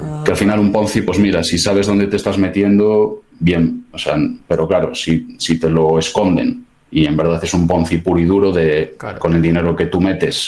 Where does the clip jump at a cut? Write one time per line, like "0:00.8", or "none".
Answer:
0:04.4